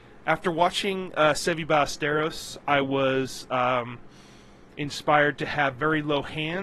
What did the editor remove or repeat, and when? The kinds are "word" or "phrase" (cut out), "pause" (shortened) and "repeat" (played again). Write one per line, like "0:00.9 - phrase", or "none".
none